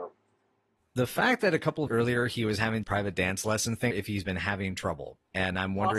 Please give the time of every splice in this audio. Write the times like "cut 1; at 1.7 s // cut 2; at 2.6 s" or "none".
cut 1; at 1.9 s // cut 2; at 2.8 s // cut 3; at 3.9 s